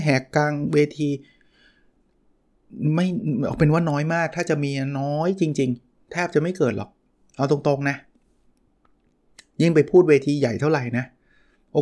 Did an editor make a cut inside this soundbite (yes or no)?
no